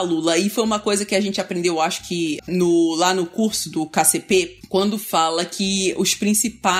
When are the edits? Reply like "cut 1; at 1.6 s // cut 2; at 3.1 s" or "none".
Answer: cut 1; at 2.4 s